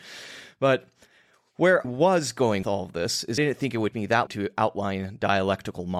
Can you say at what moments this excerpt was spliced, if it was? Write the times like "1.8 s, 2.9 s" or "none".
1.8 s, 2.6 s, 3.4 s, 3.9 s, 4.3 s